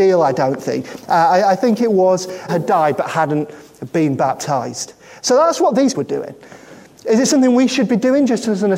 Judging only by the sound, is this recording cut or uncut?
cut